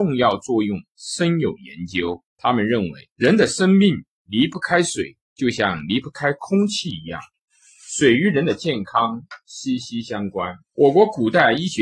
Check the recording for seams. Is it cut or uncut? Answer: cut